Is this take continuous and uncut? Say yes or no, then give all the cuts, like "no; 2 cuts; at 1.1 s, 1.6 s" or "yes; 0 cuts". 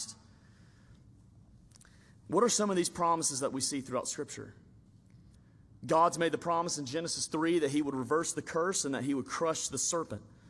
yes; 0 cuts